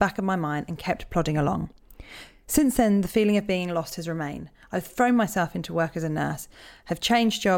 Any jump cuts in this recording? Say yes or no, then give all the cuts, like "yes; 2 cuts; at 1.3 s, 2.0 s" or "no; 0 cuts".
no; 0 cuts